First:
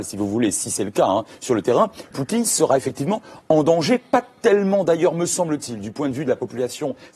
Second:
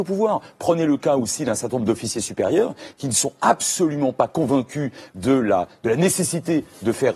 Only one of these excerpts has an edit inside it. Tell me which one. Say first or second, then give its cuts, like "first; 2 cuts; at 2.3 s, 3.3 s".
first; 1 cut; at 2.1 s